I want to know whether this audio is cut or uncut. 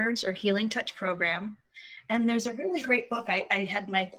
uncut